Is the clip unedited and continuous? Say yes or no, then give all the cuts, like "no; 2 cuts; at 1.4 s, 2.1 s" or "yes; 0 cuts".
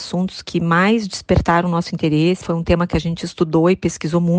no; 1 cut; at 2.4 s